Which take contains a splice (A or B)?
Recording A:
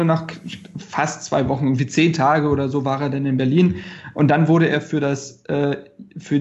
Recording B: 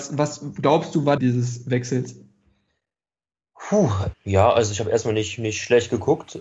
B